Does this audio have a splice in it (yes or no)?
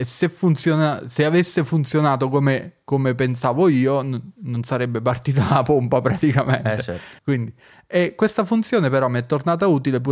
yes